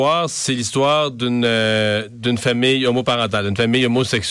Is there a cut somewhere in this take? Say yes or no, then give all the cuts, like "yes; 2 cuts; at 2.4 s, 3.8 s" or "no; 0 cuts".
no; 0 cuts